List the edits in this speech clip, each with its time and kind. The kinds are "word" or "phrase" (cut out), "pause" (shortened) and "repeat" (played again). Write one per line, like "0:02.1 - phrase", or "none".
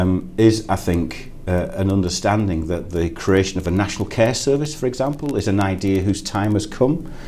none